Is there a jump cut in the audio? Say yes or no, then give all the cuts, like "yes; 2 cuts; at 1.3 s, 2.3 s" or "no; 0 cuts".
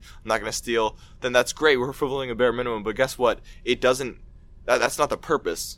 no; 0 cuts